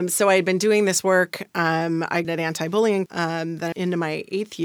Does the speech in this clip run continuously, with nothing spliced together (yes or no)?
no